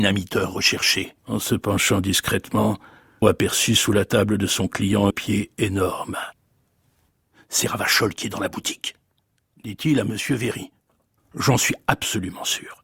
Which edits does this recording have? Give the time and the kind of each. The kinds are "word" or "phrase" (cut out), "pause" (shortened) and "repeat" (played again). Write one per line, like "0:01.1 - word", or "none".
0:01.2 - pause
0:03.2 - word
0:05.1 - phrase